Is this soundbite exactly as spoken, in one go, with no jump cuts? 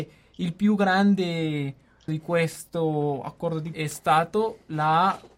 no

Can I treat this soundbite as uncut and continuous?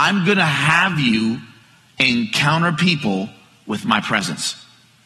yes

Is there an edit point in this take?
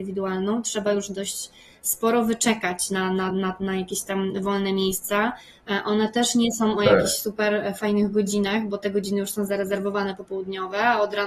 no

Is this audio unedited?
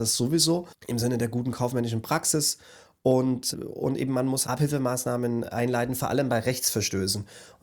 no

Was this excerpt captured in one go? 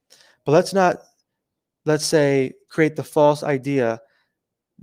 yes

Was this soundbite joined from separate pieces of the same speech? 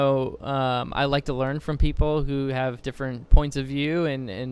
no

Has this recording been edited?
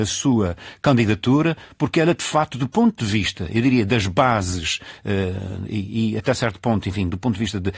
no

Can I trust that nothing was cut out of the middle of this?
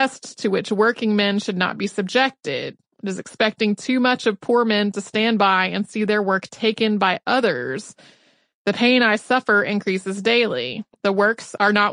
yes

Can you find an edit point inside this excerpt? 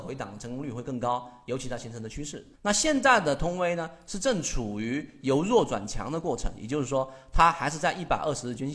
yes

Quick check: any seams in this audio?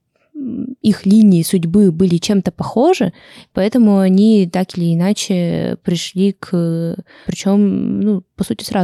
yes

